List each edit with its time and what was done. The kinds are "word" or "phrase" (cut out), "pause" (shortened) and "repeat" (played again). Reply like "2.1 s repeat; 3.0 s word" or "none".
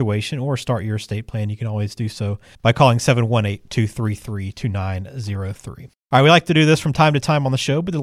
2.5 s pause